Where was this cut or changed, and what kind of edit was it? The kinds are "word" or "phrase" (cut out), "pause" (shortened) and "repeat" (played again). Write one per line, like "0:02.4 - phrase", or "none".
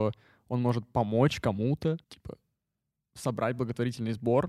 0:02.0 - pause